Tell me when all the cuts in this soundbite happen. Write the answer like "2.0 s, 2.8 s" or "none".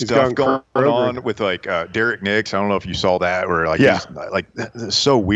none